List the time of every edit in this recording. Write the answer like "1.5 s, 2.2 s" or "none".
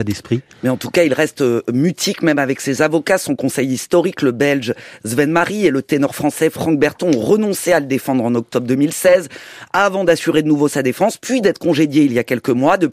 none